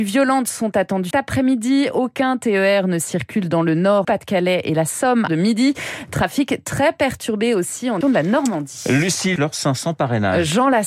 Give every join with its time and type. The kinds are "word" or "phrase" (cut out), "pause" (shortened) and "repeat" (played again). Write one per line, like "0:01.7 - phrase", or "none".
0:01.1 - word
0:04.0 - word
0:05.3 - phrase
0:08.0 - word
0:09.4 - phrase

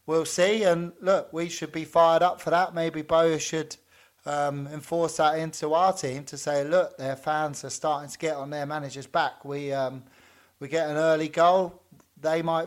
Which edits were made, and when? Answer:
none

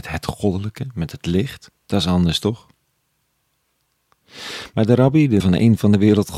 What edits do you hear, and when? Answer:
0:01.8 - pause
0:05.4 - word

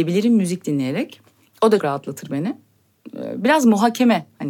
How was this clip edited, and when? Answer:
0:01.8 - word

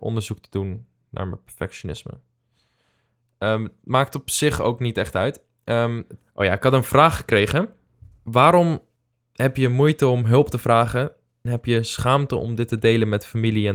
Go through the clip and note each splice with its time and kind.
0:11.5 - word

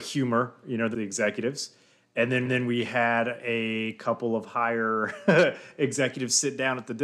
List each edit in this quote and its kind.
0:00.9 - phrase
0:02.5 - repeat

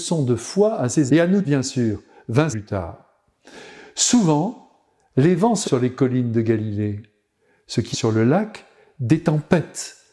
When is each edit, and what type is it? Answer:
0:01.1 - word
0:01.4 - word
0:02.5 - word
0:05.6 - word
0:07.9 - word

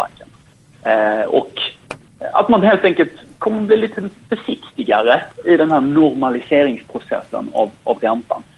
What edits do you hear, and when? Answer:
none

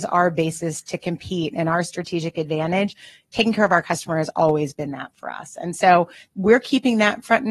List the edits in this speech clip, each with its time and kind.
none

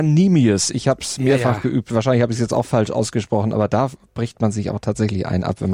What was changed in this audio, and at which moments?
none

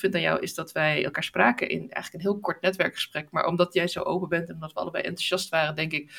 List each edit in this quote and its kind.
none

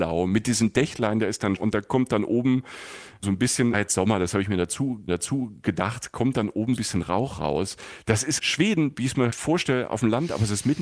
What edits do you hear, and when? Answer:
0:01.6 - word
0:03.7 - phrase
0:05.1 - repeat
0:06.8 - phrase
0:08.4 - word
0:09.3 - word

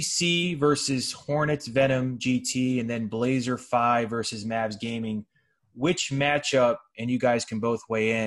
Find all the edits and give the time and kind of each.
none

